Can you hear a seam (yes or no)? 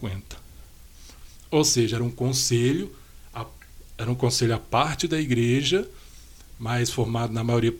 no